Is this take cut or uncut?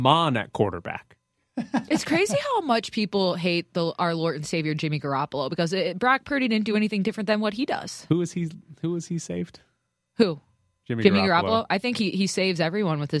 uncut